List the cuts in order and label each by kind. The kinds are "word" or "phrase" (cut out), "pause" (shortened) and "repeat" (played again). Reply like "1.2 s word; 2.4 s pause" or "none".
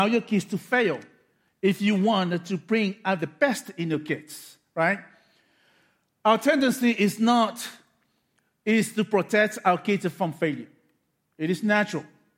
none

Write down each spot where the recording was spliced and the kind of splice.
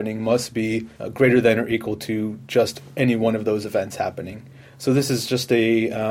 0.9 s pause

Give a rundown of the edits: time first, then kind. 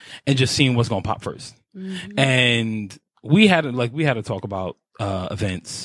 none

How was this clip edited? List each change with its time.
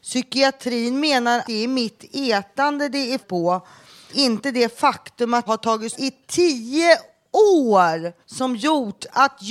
1.4 s word; 3.2 s word; 4.1 s word; 5.5 s word; 5.9 s word; 8.2 s pause

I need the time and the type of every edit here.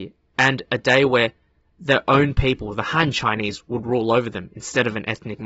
none

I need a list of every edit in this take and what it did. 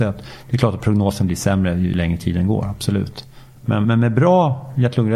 1.9 s word; 3.8 s word

